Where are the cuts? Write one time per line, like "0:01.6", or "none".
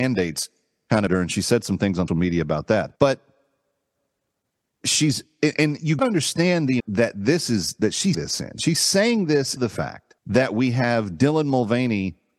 0:01.1
0:02.1
0:03.0
0:06.0
0:06.8
0:08.1
0:09.6
0:10.2